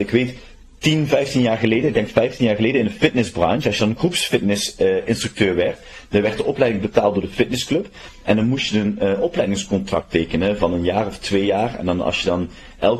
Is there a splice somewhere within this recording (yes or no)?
no